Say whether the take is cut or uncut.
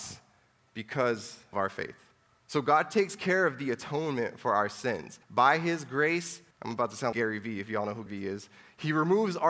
cut